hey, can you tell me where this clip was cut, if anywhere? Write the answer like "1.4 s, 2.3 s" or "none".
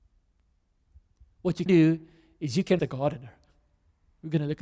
1.7 s, 2.8 s